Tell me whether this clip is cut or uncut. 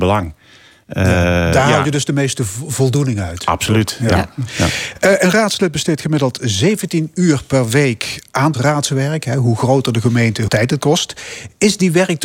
cut